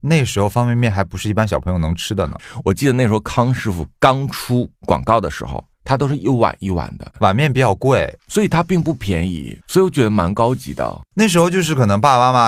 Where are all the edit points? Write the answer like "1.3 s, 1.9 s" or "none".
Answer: 4.8 s, 8.2 s, 9.6 s